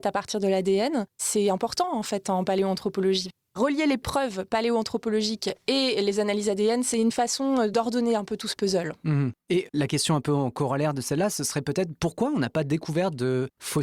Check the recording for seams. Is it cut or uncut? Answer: uncut